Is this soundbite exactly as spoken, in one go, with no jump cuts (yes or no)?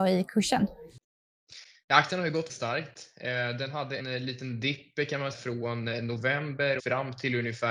no